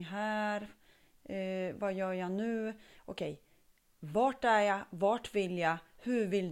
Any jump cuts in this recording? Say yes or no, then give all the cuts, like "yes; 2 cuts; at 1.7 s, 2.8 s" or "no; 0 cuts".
no; 0 cuts